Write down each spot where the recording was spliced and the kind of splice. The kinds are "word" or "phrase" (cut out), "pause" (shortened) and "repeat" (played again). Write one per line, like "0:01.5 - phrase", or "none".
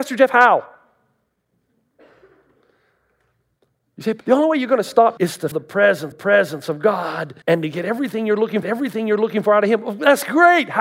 0:04.2 - pause
0:05.2 - word
0:05.5 - word
0:06.1 - repeat
0:07.4 - pause
0:08.6 - repeat